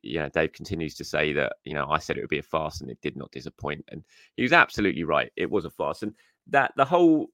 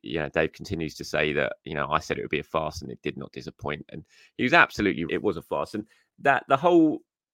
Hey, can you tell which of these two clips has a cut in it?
second; 1 cut; at 5.1 s

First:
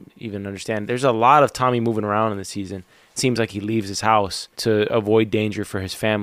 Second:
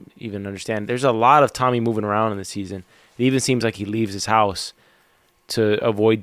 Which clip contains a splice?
first; 2 cuts; at 3.2 s, 4.5 s

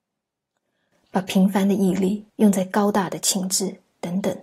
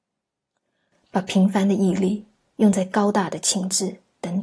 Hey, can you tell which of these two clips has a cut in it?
first; 1 cut; at 2.3 s

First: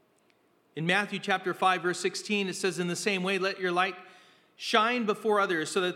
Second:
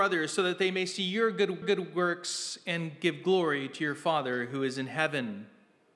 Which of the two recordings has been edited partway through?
second; 1 cut; at 1.6 s

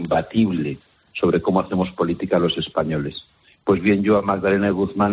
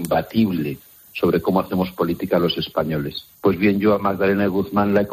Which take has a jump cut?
second; 1 cut; at 3.3 s

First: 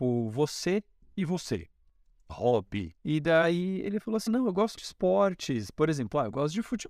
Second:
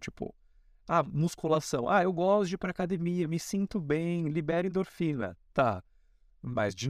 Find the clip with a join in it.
first; 4 cuts; at 2.3 s, 2.9 s, 4.3 s, 4.8 s

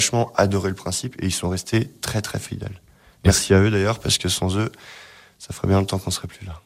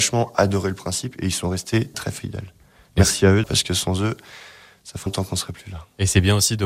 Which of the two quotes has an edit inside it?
second; 3 cuts; at 1.9 s, 3.4 s, 5.1 s

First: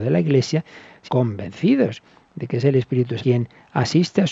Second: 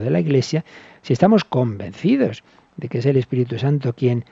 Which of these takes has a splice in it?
first; 2 cuts; at 1.1 s, 3.2 s

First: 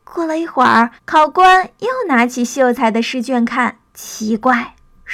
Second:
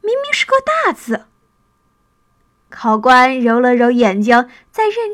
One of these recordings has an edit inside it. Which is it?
first; 2 cuts; at 1.0 s, 3.9 s

